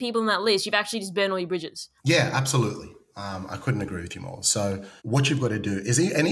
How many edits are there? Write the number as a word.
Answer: two